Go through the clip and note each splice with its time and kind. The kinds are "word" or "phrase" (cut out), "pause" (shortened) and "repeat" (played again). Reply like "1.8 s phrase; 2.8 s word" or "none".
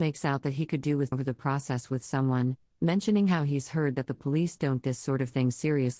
1.1 s word; 4.8 s word